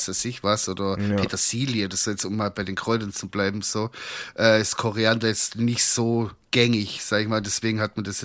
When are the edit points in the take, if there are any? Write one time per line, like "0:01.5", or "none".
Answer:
0:06.4